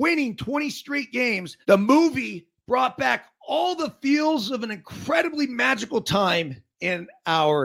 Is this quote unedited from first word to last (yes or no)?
no